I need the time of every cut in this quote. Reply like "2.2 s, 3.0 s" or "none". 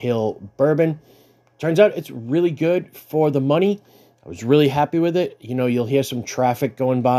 none